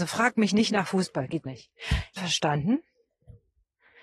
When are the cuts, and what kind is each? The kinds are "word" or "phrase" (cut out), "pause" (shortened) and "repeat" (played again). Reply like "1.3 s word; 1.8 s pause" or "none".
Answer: 1.5 s word; 2.2 s phrase

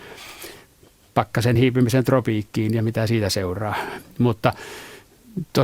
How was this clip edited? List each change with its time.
none

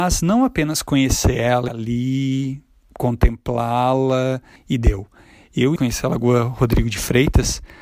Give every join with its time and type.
1.7 s phrase; 4.6 s pause; 5.8 s phrase

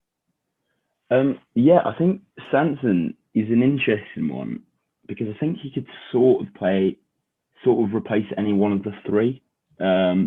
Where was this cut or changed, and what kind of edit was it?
none

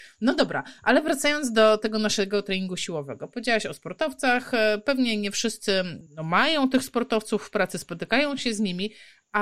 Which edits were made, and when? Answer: 6.1 s pause

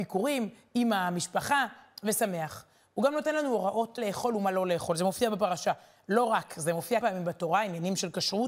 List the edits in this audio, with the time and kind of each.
4.0 s word; 7.0 s word

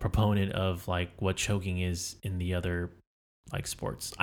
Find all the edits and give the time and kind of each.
none

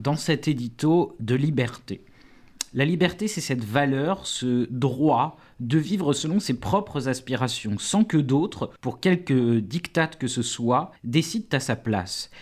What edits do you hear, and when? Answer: 8.8 s pause; 11.0 s pause

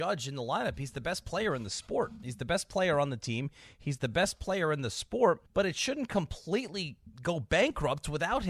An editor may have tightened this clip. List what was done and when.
5.5 s pause; 7.1 s pause

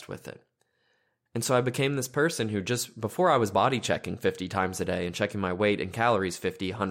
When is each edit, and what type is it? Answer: none

